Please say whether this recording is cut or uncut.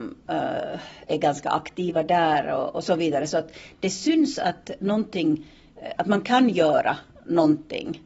uncut